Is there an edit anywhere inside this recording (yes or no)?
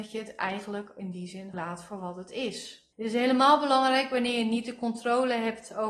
yes